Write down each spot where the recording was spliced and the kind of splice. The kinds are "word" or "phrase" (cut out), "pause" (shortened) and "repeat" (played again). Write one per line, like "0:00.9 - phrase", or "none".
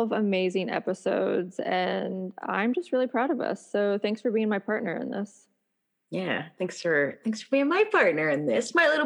none